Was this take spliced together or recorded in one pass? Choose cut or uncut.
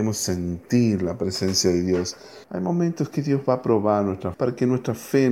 cut